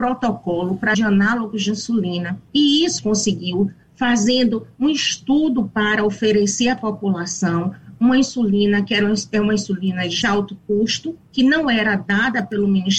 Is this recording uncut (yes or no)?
no